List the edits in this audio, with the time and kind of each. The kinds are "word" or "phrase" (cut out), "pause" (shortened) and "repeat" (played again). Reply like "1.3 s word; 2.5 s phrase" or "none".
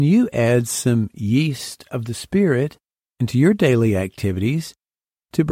none